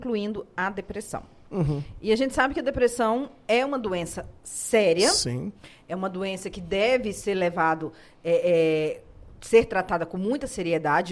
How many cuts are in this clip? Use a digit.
0